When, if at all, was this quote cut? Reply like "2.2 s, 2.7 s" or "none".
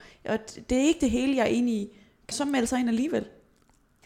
2.3 s